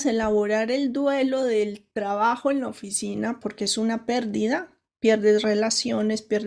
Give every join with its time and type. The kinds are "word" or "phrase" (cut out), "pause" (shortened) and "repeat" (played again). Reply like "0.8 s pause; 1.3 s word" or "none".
3.4 s word